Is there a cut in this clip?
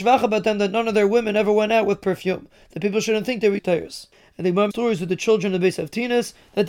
yes; 2 cuts; at 3.6 s, 4.7 s

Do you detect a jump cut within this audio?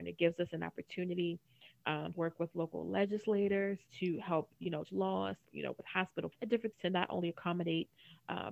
yes; 6 cuts; at 2.1 s, 3.9 s, 4.8 s, 5.4 s, 6.3 s, 6.7 s

